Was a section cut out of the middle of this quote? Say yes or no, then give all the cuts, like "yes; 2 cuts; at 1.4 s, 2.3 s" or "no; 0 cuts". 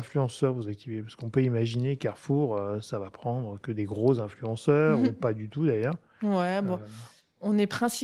no; 0 cuts